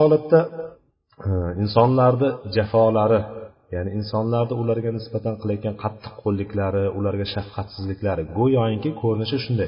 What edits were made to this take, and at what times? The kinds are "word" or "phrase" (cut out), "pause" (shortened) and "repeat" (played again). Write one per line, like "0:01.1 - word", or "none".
none